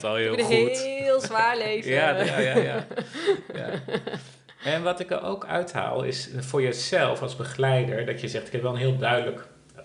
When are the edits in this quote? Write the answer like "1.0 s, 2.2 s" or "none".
none